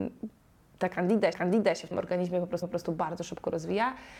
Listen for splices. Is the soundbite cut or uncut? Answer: cut